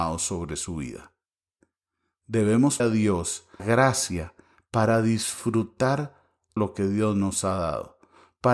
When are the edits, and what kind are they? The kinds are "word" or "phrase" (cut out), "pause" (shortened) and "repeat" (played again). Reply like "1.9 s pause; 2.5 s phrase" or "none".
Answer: 2.8 s word; 3.6 s word; 6.6 s word